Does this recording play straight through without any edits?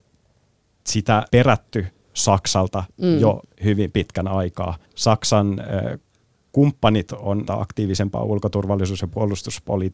no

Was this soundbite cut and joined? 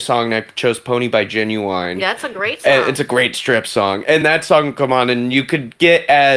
yes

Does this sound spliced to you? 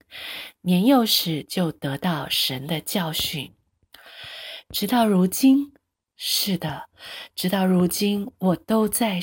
no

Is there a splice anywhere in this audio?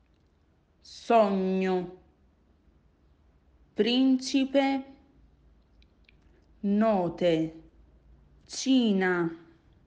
no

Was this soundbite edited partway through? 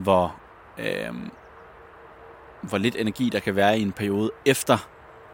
no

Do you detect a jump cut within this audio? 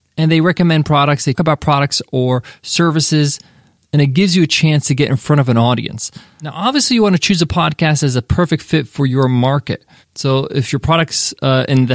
yes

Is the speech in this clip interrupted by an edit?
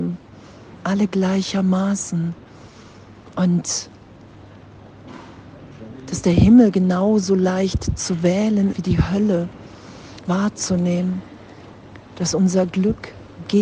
yes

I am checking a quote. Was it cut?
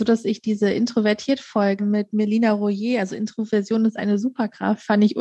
yes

